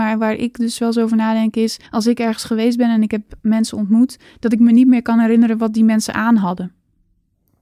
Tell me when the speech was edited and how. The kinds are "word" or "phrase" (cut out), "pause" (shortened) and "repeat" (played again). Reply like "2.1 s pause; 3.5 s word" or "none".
1.9 s pause